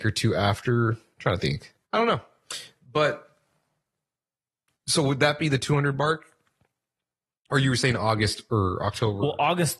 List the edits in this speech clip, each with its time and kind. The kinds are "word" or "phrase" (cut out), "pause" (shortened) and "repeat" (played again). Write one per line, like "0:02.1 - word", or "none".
0:01.8 - pause